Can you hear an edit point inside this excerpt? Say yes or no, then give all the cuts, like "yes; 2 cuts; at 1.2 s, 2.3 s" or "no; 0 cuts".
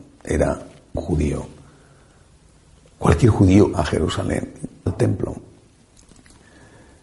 yes; 3 cuts; at 0.9 s, 3.7 s, 4.9 s